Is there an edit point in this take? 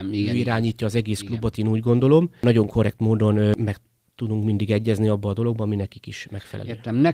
no; 0 cuts

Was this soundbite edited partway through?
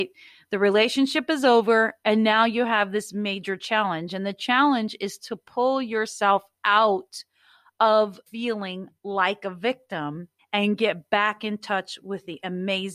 yes; 2 cuts; at 8.3 s, 10.4 s

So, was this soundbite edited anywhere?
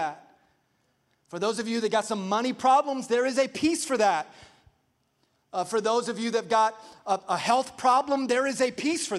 no; 0 cuts

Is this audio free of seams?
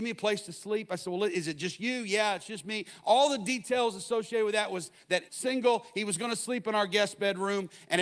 no; 1 cut; at 5.3 s

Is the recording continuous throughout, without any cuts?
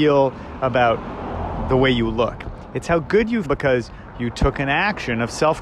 no; 1 cut; at 3.4 s

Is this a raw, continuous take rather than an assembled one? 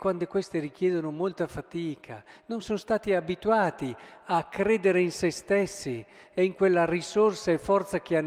yes; 0 cuts

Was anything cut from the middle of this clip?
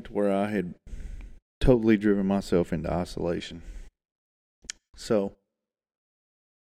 yes; 1 cut; at 1.4 s

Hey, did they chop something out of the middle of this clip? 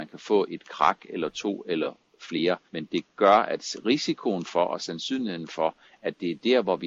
yes; 1 cut; at 2.7 s

